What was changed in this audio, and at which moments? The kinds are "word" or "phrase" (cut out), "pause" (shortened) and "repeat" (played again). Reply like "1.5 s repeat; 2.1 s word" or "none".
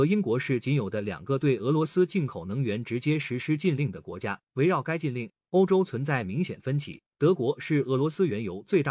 4.5 s pause; 7.1 s pause